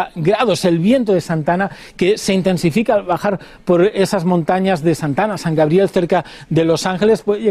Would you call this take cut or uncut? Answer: uncut